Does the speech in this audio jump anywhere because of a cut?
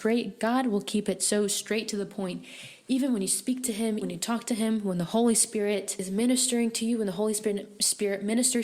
yes; 1 cut; at 4.0 s

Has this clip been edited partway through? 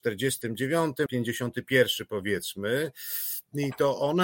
yes; 1 cut; at 1.1 s

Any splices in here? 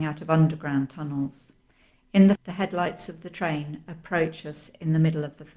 yes; 1 cut; at 2.4 s

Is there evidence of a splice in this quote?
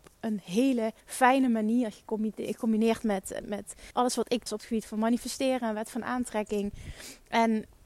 yes; 4 cuts; at 1.0 s, 3.4 s, 3.9 s, 4.5 s

